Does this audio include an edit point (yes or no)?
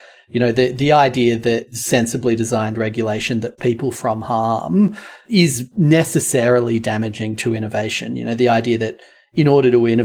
yes